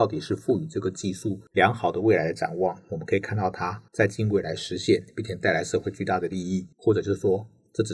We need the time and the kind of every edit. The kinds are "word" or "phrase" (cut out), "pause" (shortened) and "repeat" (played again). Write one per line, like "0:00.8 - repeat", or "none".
0:03.9 - pause
0:06.7 - pause